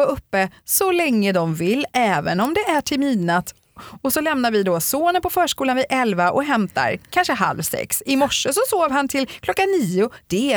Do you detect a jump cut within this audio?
no; 0 cuts

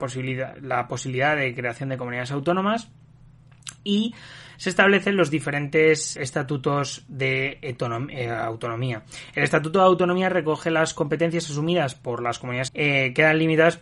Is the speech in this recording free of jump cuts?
no; 2 cuts; at 6.2 s, 12.7 s

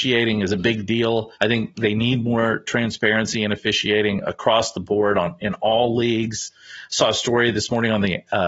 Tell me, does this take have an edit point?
yes; 1 cut; at 1.4 s

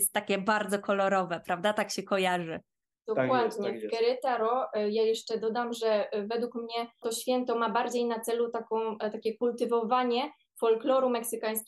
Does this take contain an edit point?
no; 0 cuts

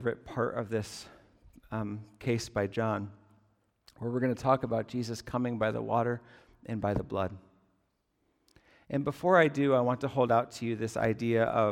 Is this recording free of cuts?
yes; 0 cuts

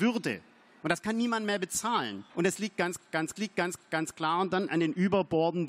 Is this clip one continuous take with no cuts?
no; 2 cuts; at 2.3 s, 3.4 s

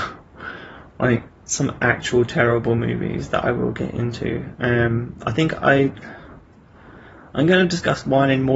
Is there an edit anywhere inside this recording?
no; 0 cuts

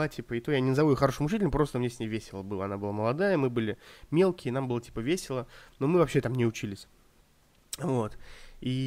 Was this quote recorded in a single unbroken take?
yes; 0 cuts

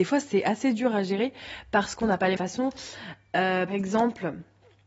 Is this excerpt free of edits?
no; 2 cuts; at 2.4 s, 3.7 s

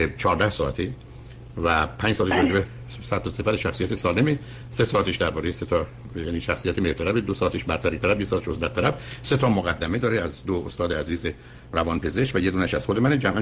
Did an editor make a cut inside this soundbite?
no; 0 cuts

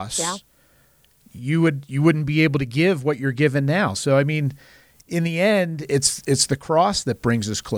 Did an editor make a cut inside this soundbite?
no; 0 cuts

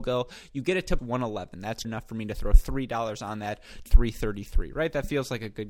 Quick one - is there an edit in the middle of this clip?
yes; 3 cuts; at 1.0 s, 1.8 s, 3.9 s

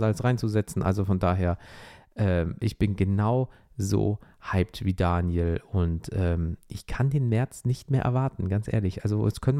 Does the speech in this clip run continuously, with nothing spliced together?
yes; 0 cuts

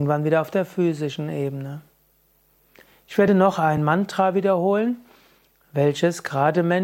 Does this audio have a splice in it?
no; 0 cuts

